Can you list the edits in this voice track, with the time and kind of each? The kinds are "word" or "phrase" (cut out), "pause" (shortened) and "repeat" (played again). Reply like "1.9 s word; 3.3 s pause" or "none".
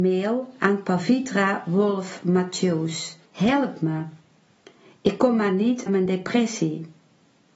3.3 s pause; 5.9 s word